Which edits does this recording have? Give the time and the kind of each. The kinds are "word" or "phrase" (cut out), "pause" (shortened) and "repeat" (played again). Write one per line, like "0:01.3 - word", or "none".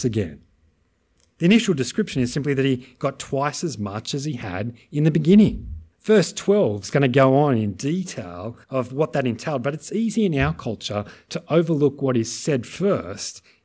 0:05.9 - pause
0:08.6 - pause